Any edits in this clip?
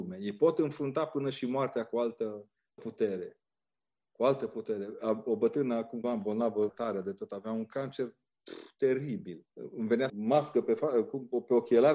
yes; 5 cuts; at 2.8 s, 6.0 s, 6.7 s, 9.5 s, 10.1 s

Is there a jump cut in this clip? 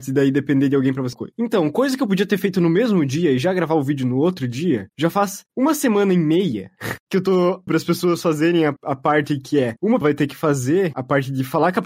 yes; 4 cuts; at 1.1 s, 7.7 s, 10.0 s, 10.9 s

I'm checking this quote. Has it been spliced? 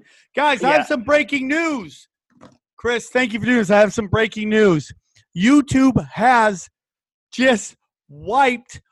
no; 0 cuts

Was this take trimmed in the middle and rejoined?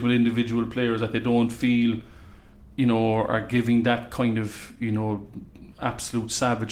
no; 0 cuts

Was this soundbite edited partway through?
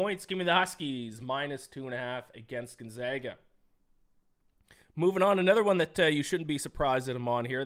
no; 0 cuts

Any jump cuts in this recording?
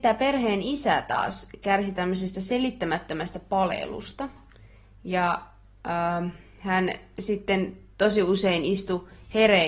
no; 0 cuts

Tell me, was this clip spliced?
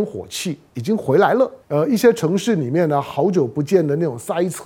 yes; 1 cut; at 1.6 s

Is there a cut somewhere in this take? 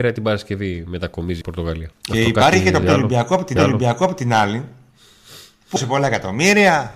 yes; 5 cuts; at 1.4 s, 1.9 s, 2.8 s, 3.6 s, 5.8 s

